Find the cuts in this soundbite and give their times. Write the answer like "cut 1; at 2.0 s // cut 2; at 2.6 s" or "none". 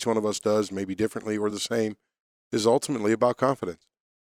none